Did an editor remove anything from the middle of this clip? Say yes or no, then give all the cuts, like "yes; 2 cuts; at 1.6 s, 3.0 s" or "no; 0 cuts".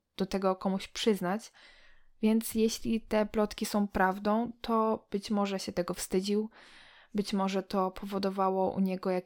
no; 0 cuts